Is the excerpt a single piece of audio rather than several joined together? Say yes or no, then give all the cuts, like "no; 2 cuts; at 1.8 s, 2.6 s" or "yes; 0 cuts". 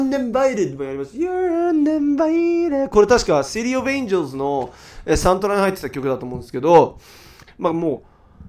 yes; 0 cuts